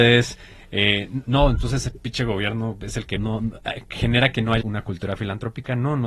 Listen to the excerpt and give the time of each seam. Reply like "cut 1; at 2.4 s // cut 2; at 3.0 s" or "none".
cut 1; at 1.2 s // cut 2; at 3.2 s // cut 3; at 4.6 s

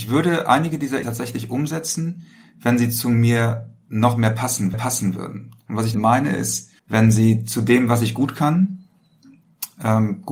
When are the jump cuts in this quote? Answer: cut 1; at 1.0 s // cut 2; at 4.7 s // cut 3; at 5.9 s // cut 4; at 6.8 s

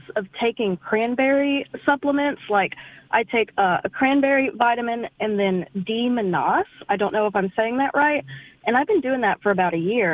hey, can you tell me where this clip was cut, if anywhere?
none

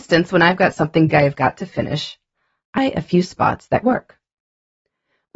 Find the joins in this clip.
cut 1; at 1.1 s // cut 2; at 2.8 s // cut 3; at 3.8 s

